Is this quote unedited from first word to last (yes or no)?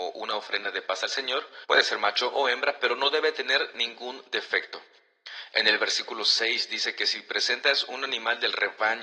no